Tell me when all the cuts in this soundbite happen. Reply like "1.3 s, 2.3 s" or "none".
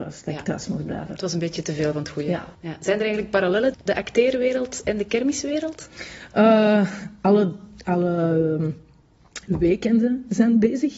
2.5 s, 3.7 s